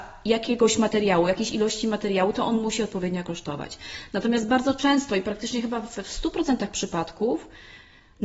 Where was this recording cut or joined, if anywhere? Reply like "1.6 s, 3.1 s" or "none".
none